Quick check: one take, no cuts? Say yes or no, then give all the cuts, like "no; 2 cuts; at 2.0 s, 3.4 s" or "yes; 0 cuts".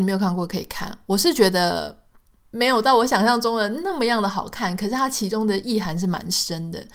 yes; 0 cuts